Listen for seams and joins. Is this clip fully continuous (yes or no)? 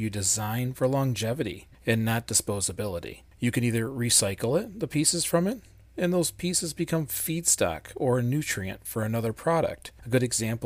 yes